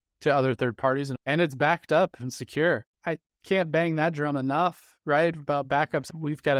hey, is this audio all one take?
no; 1 cut; at 1.2 s

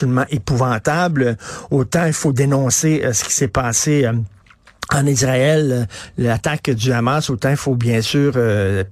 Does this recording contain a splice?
no; 0 cuts

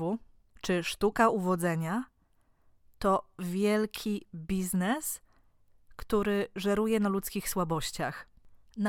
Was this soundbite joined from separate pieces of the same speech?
no; 0 cuts

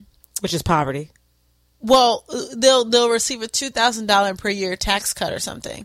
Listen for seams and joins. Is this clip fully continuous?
yes; 0 cuts

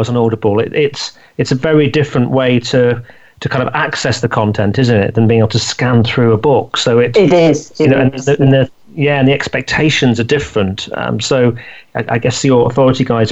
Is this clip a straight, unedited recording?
yes; 0 cuts

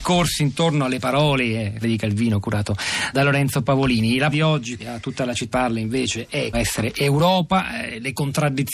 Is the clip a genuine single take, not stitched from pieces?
no; 6 cuts; at 1.8 s, 3.1 s, 4.3 s, 4.8 s, 5.5 s, 6.5 s

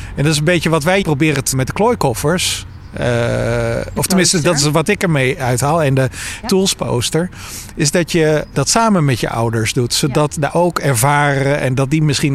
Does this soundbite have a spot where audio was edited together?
yes; 6 cuts; at 1.0 s, 1.5 s, 4.0 s, 6.4 s, 8.5 s, 10.5 s

